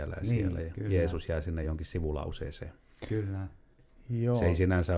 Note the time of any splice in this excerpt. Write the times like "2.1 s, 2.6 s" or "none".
none